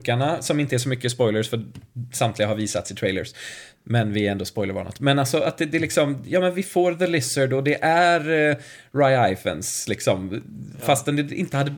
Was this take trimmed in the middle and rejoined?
no; 0 cuts

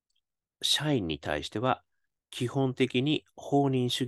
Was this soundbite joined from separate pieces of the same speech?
no; 0 cuts

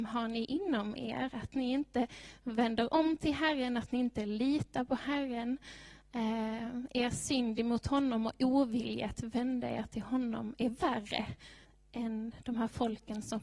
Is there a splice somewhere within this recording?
no; 0 cuts

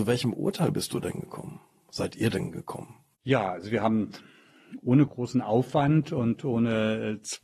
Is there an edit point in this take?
no; 0 cuts

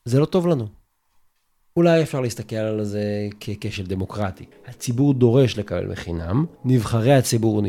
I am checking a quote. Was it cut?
yes; 2 cuts; at 4.5 s, 6.5 s

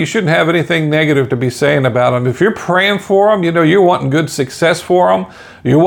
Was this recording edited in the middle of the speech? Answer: no; 0 cuts

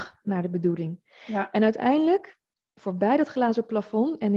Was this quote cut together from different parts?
no; 0 cuts

